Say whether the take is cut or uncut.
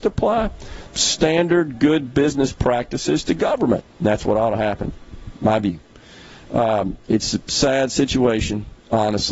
uncut